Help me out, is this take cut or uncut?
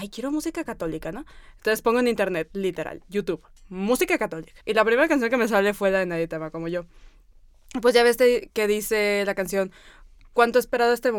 cut